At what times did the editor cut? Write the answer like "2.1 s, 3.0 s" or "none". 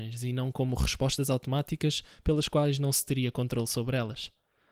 none